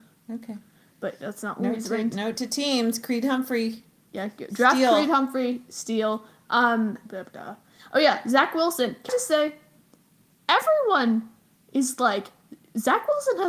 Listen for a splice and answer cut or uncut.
cut